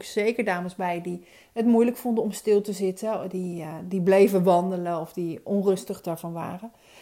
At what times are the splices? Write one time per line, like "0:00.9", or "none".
none